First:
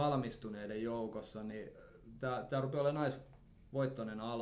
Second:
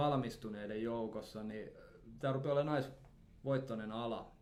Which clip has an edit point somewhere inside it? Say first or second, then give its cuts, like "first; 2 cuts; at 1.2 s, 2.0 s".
second; 1 cut; at 2.2 s